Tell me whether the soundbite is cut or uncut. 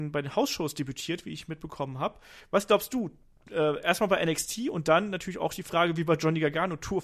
uncut